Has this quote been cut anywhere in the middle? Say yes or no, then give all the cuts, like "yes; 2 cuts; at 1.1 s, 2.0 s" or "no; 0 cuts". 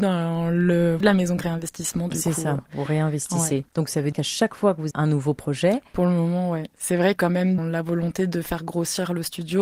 yes; 7 cuts; at 1.0 s, 1.4 s, 3.7 s, 4.1 s, 4.9 s, 7.2 s, 7.6 s